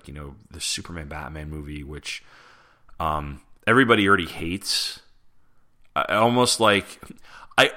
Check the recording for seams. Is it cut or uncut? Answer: cut